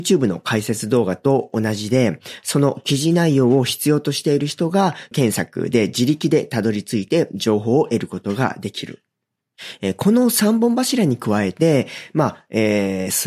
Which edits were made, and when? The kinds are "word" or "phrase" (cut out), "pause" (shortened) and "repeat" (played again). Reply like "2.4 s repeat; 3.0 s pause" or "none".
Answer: 5.1 s word